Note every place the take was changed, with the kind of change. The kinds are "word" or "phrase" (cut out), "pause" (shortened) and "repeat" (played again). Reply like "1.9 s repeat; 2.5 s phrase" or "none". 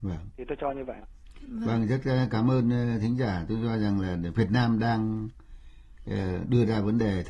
1.0 s word